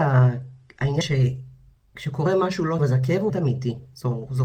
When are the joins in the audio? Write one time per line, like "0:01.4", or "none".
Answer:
0:01.0
0:02.8
0:03.3